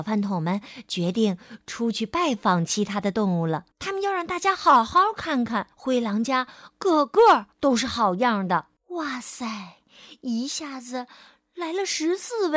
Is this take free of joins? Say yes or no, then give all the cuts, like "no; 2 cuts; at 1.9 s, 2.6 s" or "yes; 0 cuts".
no; 4 cuts; at 3.7 s, 5.7 s, 7.5 s, 8.8 s